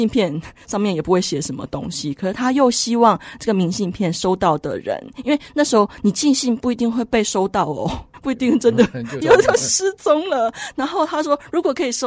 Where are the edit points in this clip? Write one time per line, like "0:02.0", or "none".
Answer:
0:09.2